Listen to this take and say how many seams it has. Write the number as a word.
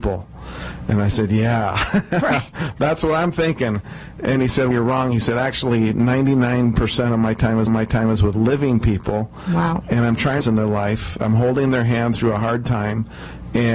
three